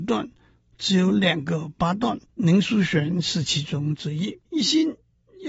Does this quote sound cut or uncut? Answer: cut